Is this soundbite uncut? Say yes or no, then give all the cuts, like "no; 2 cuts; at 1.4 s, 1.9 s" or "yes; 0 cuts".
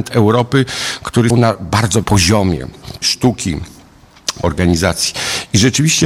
no; 4 cuts; at 1.3 s, 2.0 s, 3.0 s, 4.4 s